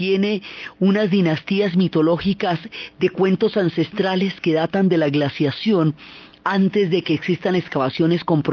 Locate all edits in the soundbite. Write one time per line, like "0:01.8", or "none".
none